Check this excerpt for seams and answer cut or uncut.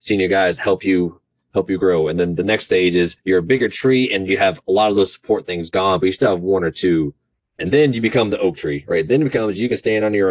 uncut